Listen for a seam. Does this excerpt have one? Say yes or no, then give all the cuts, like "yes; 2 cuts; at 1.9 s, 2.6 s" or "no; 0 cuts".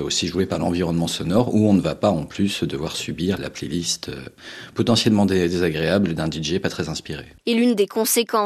yes; 1 cut; at 3.4 s